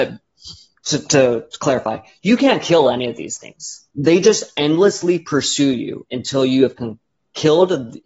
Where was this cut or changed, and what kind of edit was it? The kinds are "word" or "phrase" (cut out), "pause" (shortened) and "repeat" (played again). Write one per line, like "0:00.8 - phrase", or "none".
none